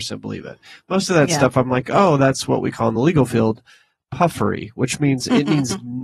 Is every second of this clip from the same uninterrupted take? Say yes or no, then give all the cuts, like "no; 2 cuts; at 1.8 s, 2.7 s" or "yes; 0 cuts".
yes; 0 cuts